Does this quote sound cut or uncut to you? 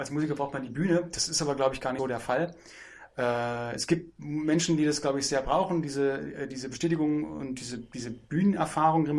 cut